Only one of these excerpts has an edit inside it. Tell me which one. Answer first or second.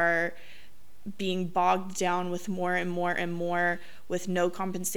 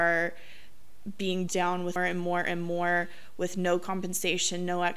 second